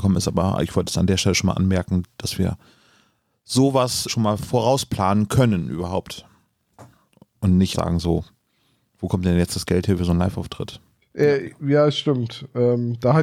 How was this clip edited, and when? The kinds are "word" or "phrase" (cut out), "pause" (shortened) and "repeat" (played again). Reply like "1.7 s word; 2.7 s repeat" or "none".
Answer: 4.1 s word; 7.7 s word

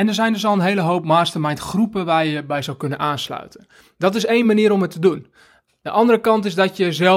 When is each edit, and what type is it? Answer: none

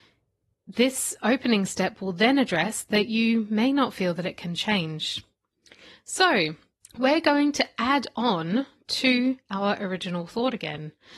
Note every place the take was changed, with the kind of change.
6.8 s pause

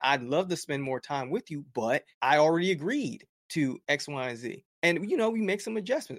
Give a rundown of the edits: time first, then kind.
2.1 s pause; 4.7 s pause

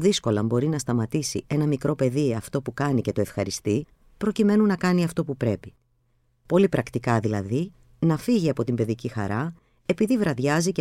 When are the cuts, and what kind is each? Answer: none

